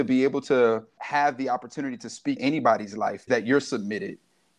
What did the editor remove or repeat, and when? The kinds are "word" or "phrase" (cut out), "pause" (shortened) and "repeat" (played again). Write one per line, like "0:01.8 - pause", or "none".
0:01.0 - word
0:02.4 - word
0:03.3 - word